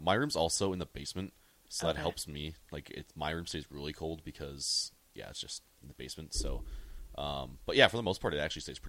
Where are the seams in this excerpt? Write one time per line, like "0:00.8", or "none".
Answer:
none